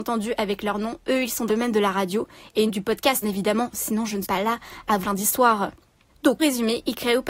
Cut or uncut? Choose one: cut